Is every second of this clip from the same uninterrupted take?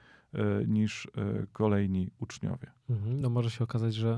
yes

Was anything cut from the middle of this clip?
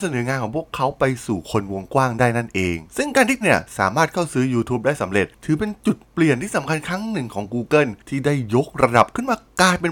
yes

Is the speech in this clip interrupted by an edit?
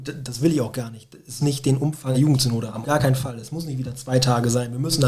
yes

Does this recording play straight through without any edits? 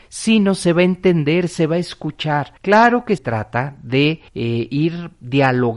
no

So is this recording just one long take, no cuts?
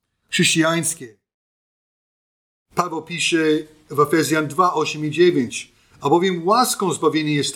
yes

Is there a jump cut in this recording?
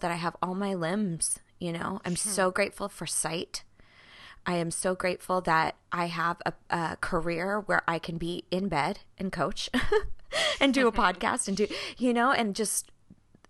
no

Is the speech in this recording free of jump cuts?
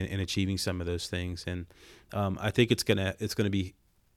yes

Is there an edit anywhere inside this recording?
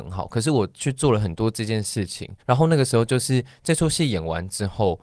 yes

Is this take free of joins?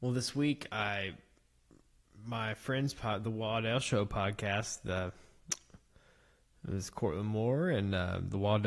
yes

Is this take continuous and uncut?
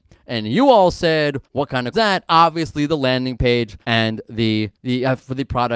no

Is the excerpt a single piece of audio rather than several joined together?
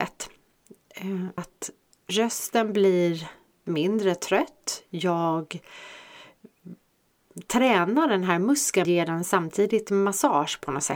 no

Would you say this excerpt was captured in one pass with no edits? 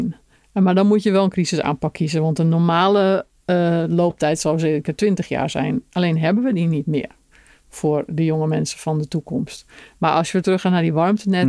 no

